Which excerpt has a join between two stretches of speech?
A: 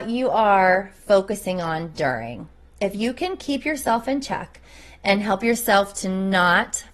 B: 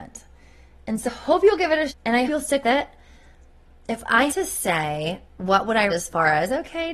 B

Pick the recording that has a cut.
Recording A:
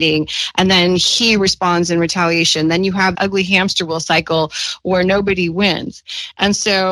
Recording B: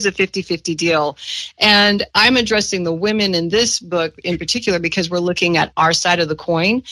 A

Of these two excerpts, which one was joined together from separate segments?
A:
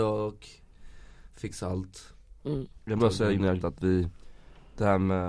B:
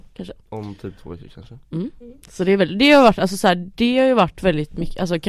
A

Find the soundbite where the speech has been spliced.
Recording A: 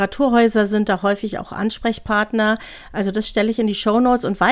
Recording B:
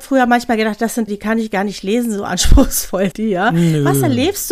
B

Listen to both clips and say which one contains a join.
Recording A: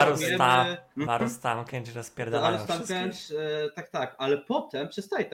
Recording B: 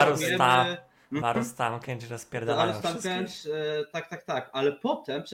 A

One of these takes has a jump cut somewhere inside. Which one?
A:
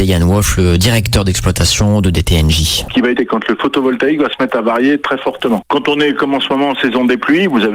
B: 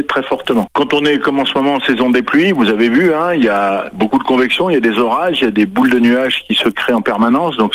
A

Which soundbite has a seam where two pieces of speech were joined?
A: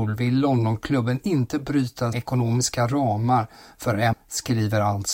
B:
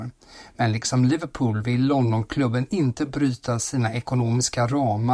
A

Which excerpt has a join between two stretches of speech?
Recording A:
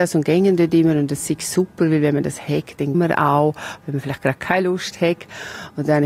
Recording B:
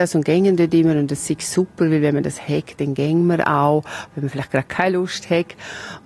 A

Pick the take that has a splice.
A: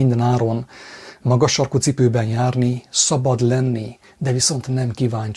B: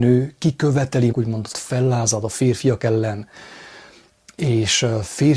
B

